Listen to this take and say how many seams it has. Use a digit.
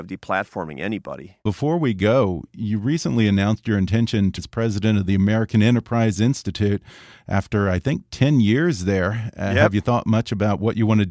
2